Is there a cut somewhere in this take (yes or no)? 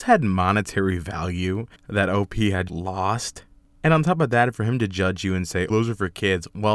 yes